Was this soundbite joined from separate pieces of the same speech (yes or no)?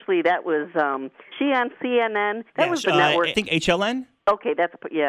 yes